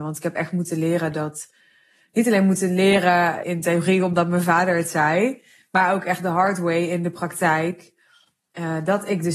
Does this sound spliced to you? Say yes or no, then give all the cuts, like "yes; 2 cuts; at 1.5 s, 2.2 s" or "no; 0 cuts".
yes; 1 cut; at 3.4 s